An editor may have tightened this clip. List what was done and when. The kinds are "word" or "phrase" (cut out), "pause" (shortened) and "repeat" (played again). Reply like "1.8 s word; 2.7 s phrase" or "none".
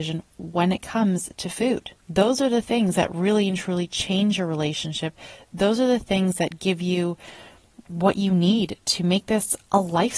2.0 s pause